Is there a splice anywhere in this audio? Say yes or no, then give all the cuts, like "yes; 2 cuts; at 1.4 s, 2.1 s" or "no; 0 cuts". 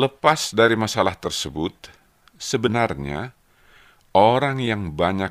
no; 0 cuts